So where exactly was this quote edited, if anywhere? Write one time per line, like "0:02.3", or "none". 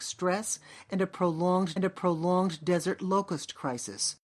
0:01.8